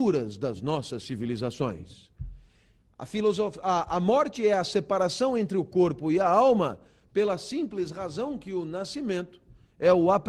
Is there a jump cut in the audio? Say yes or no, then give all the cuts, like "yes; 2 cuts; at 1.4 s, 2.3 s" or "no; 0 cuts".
no; 0 cuts